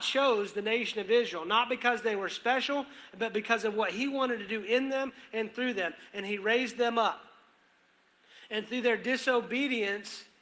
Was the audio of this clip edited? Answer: no; 0 cuts

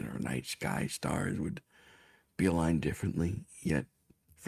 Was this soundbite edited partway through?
no; 0 cuts

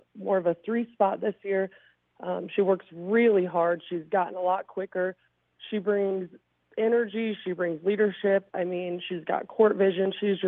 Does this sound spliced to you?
no; 0 cuts

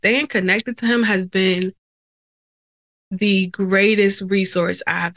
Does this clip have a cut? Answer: no; 0 cuts

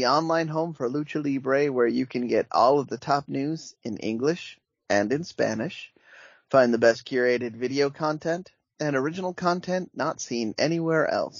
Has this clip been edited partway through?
no; 0 cuts

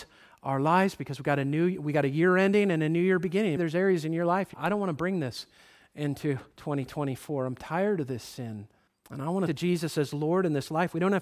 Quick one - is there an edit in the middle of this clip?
yes; 5 cuts; at 3.6 s, 4.5 s, 6.5 s, 8.9 s, 9.5 s

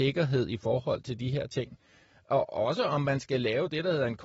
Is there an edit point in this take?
no; 0 cuts

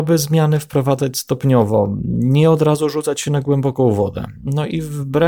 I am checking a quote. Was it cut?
no; 0 cuts

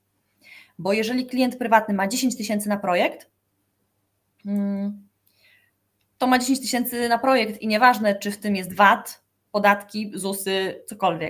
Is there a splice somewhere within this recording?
no; 0 cuts

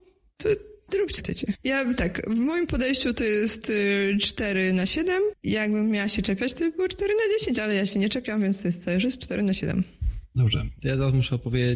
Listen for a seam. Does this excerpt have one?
yes; 2 cuts; at 1.2 s, 5.4 s

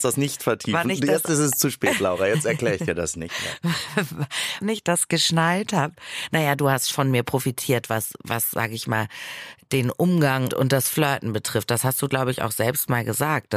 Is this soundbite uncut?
no; 3 cuts; at 4.6 s, 6.9 s, 10.5 s

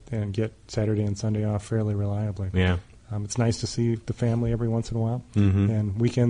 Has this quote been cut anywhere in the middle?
no; 0 cuts

